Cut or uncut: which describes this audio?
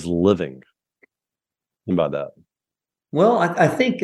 cut